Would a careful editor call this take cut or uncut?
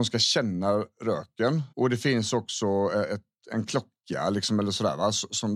cut